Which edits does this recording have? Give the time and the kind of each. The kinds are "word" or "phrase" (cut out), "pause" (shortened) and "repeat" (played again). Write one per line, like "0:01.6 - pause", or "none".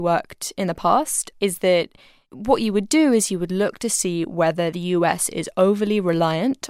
none